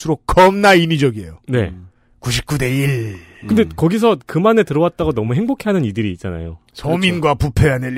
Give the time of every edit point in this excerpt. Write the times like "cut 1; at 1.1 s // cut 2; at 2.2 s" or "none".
none